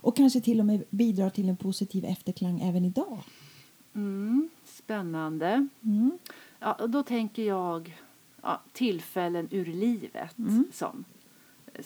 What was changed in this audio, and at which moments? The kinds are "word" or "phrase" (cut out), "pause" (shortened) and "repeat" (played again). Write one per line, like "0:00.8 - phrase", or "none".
none